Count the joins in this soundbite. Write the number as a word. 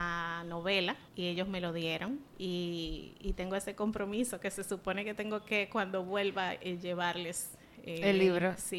zero